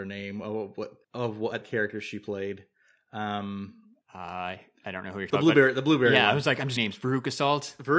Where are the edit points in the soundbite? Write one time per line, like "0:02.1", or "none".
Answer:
0:01.0
0:01.6
0:04.0
0:05.3
0:06.8